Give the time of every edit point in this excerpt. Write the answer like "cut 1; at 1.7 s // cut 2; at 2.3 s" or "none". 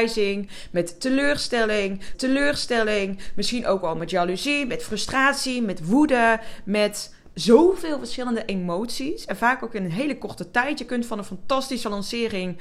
cut 1; at 2.1 s